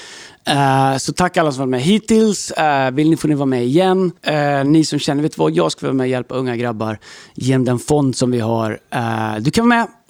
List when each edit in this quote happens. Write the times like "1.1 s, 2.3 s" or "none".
4.2 s